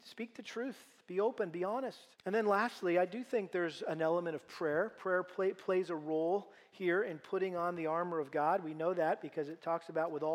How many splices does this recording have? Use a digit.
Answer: 1